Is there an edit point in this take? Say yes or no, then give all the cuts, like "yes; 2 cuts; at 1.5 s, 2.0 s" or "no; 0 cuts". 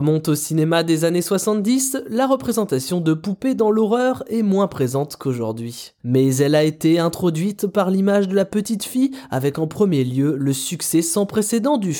no; 0 cuts